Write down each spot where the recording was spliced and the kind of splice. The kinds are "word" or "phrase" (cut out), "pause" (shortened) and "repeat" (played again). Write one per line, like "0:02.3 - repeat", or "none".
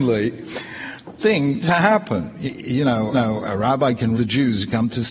0:01.2 - phrase
0:01.6 - word
0:02.5 - word
0:03.1 - repeat
0:04.1 - word